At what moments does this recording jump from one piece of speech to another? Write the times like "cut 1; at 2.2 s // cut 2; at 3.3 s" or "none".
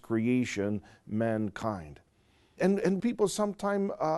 cut 1; at 2.6 s // cut 2; at 3.0 s